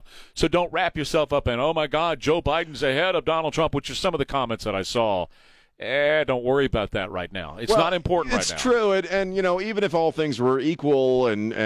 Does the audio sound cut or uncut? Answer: uncut